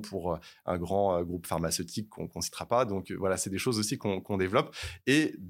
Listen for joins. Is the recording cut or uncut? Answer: uncut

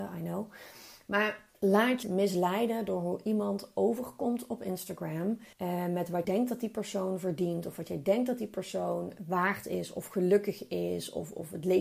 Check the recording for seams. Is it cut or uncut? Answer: cut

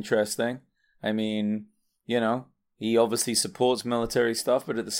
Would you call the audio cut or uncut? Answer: uncut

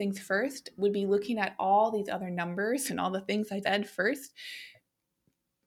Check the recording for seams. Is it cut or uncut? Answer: cut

